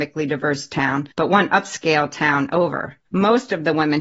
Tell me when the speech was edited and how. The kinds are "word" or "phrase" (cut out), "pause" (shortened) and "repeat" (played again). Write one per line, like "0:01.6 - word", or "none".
0:01.1 - pause
0:03.1 - pause